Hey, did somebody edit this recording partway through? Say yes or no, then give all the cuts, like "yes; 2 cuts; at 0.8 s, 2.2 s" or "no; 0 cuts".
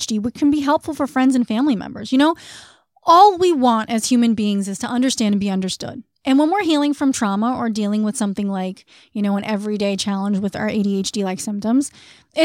no; 0 cuts